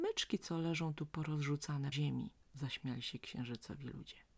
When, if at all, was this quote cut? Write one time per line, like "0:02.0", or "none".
0:01.9
0:02.4

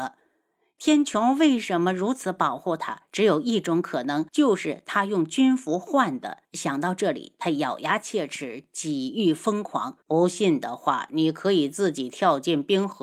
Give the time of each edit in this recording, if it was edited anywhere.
0:04.3
0:06.4
0:10.0

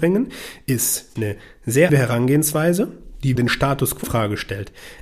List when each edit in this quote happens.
0:01.2
0:01.9
0:03.4
0:04.0

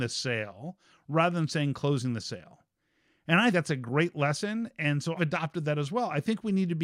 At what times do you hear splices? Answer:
0:03.5
0:05.2

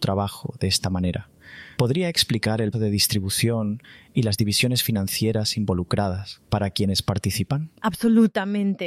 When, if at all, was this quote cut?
0:01.7
0:02.7
0:06.4

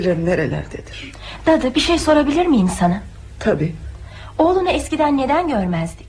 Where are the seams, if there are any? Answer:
none

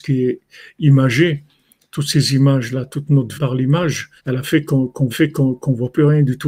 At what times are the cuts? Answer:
0:03.3
0:04.2
0:05.1

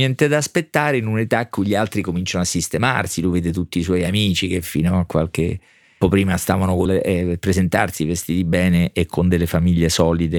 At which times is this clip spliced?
0:06.0
0:06.8

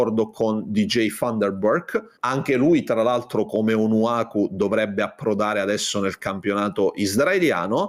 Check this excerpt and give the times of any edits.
0:02.2

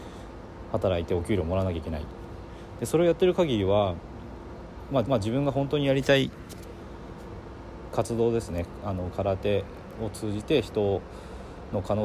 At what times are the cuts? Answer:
0:05.0

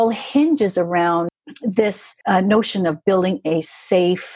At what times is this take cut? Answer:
0:02.2

